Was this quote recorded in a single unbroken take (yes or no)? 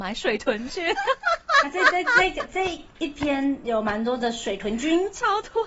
yes